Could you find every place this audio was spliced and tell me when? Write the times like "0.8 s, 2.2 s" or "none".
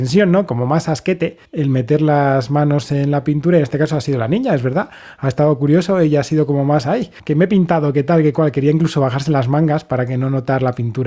1.5 s, 7.2 s